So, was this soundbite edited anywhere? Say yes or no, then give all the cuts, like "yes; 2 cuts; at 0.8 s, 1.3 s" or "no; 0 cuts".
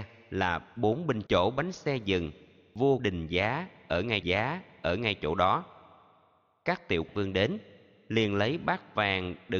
yes; 4 cuts; at 1.3 s, 3.0 s, 4.2 s, 7.1 s